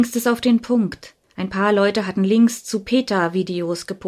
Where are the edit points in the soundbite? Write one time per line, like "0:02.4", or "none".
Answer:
0:01.2